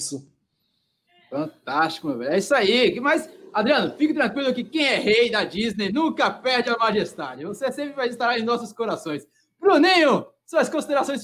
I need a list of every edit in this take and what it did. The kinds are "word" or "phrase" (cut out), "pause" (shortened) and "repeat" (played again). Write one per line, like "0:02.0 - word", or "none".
none